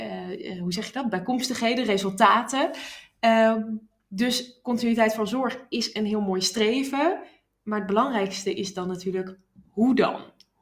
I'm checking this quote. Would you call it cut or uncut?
uncut